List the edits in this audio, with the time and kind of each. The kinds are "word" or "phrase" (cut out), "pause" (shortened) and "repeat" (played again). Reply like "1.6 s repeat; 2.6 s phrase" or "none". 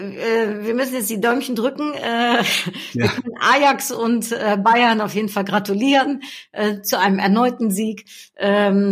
none

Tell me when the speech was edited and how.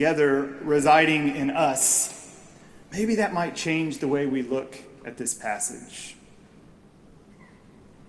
none

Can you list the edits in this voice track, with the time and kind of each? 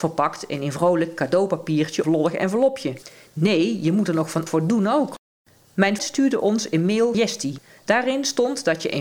2.0 s word; 4.5 s word; 6.0 s word; 7.1 s word

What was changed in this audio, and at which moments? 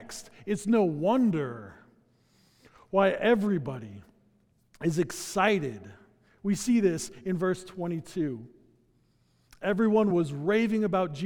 none

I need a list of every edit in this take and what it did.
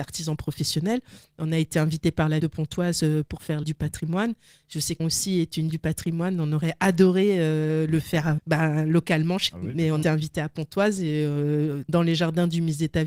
2.4 s word; 3.6 s word; 5.0 s word; 5.7 s word; 8.4 s word; 9.5 s word; 10.0 s word; 11.9 s word

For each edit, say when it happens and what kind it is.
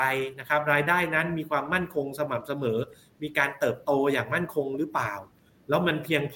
none

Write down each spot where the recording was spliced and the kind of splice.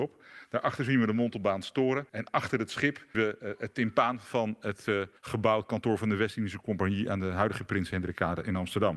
2.1 s pause; 3.1 s word; 5.2 s pause

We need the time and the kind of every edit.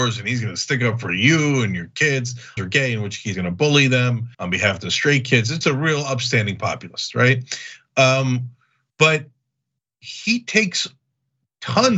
2.6 s phrase; 3.3 s word; 4.3 s pause; 5.6 s word; 9.8 s pause

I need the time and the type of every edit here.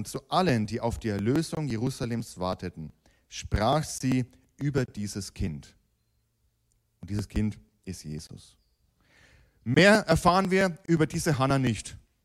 none

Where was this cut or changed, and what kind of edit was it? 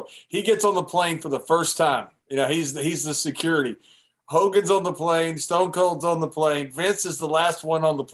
none

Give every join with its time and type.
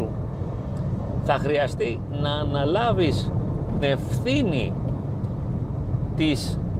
3.8 s word

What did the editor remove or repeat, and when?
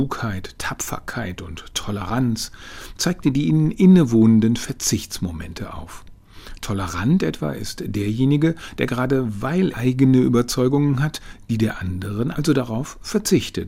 9.7 s word; 12.3 s word

